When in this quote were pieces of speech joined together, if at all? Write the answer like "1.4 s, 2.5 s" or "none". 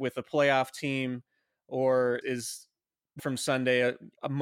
2.2 s, 3.2 s